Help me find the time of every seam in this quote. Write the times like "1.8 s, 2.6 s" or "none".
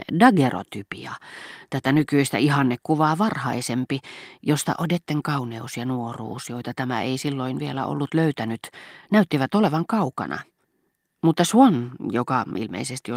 none